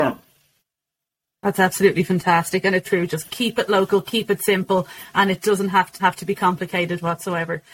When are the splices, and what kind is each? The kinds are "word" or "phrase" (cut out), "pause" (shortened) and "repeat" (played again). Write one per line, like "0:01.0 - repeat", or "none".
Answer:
0:02.8 - word
0:06.0 - word